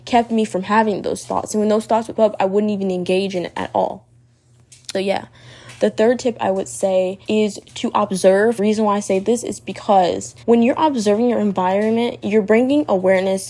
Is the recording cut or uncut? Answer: cut